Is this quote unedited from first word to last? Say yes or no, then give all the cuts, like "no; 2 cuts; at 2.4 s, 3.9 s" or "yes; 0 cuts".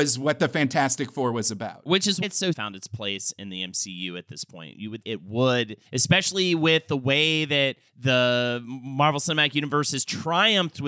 no; 5 cuts; at 2.2 s, 2.5 s, 5.0 s, 5.8 s, 7.9 s